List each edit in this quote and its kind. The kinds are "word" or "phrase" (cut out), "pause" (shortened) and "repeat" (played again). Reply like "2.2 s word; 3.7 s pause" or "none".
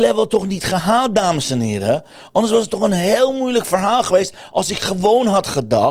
none